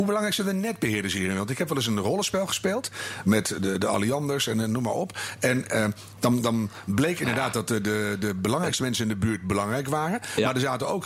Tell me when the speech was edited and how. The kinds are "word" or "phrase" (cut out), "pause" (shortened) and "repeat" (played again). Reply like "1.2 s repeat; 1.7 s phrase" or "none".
none

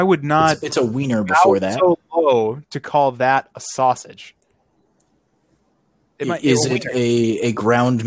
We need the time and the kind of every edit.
none

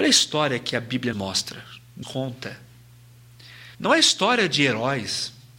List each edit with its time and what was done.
1.1 s word; 2.0 s word; 3.7 s pause

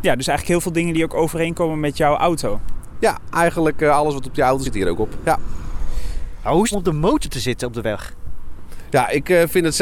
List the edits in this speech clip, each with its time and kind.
4.6 s word; 6.7 s phrase

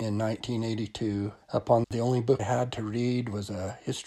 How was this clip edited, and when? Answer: 1.4 s pause; 1.8 s phrase; 2.4 s word

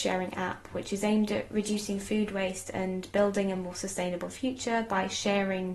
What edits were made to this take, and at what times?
none

